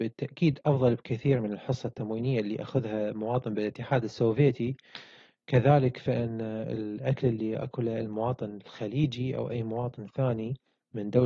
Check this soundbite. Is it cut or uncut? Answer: uncut